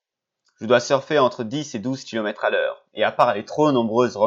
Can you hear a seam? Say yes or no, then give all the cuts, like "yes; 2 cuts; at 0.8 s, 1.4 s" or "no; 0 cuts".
no; 0 cuts